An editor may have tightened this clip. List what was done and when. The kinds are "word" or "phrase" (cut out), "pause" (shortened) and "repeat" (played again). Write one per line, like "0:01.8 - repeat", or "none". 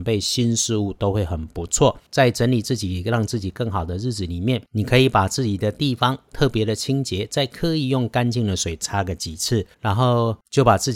0:02.1 - pause
0:04.7 - pause
0:09.7 - pause